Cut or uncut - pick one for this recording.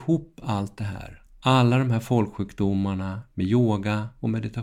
uncut